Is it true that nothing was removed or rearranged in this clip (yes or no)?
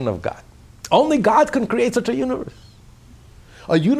yes